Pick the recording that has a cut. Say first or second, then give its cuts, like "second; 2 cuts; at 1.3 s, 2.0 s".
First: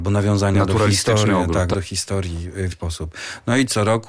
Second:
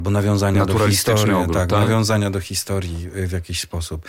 first; 2 cuts; at 1.7 s, 2.7 s